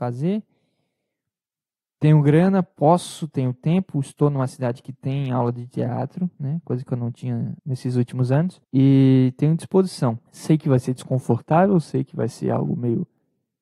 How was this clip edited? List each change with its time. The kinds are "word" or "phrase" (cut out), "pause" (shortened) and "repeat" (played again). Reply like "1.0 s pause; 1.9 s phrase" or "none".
7.6 s pause; 8.6 s pause; 10.3 s pause